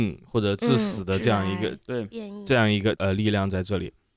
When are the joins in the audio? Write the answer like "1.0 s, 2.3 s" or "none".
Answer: none